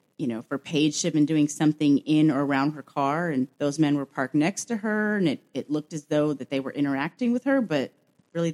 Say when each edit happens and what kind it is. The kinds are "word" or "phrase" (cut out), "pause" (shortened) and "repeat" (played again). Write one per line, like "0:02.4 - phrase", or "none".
0:03.5 - pause